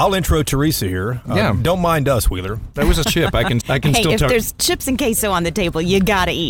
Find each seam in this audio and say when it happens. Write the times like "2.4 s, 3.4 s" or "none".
3.0 s, 3.6 s